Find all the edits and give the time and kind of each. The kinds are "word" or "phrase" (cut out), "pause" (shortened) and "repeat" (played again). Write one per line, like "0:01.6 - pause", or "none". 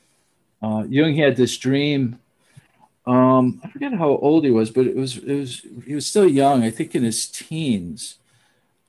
none